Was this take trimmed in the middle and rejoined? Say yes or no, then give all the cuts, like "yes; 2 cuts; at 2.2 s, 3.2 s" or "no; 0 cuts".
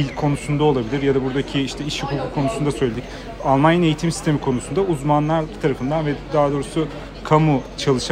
no; 0 cuts